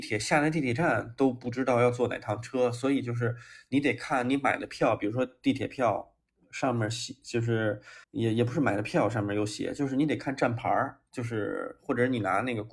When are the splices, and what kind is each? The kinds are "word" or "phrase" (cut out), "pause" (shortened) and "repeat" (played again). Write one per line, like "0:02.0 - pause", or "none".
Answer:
0:08.0 - pause